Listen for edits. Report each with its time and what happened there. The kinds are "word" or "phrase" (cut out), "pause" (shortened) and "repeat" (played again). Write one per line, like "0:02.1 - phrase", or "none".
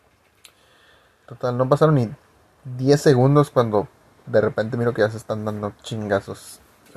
none